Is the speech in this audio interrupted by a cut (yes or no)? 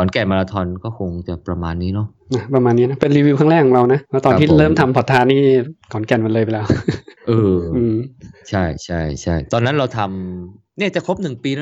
yes